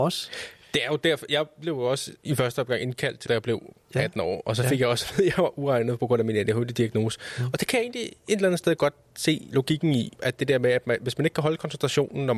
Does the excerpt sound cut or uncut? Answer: cut